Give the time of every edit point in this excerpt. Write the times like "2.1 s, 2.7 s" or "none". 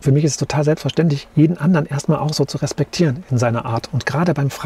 none